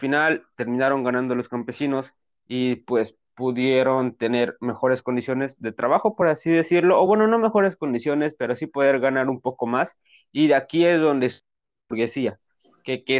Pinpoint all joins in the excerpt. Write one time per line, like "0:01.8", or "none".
none